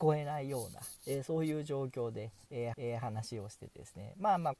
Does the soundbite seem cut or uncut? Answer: cut